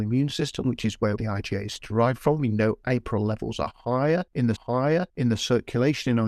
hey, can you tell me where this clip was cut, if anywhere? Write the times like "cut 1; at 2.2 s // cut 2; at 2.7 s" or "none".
cut 1; at 1.2 s // cut 2; at 4.6 s